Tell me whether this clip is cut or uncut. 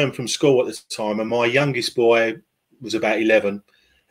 uncut